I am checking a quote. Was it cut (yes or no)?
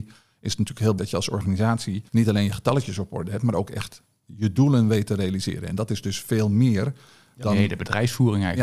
yes